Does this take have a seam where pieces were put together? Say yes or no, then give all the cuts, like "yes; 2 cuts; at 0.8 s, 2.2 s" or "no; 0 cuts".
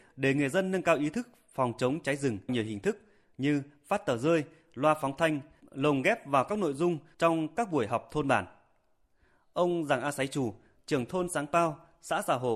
yes; 1 cut; at 2.5 s